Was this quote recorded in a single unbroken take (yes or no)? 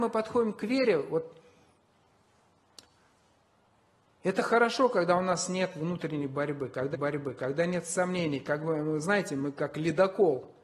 no